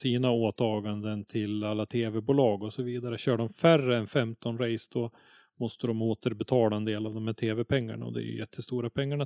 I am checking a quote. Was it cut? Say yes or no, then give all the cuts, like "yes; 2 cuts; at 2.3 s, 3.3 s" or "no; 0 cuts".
no; 0 cuts